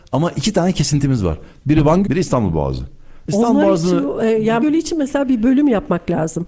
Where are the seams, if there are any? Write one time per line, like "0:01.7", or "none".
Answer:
0:02.0
0:04.6